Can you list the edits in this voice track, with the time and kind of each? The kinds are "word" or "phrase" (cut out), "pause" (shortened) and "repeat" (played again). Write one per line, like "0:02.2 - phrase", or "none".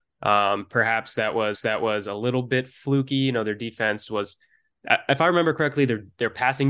0:01.5 - repeat